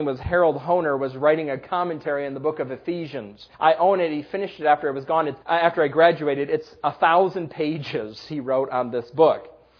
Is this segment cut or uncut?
cut